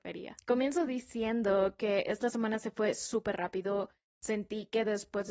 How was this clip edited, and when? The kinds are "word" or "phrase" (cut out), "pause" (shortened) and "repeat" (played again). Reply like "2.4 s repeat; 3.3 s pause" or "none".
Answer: none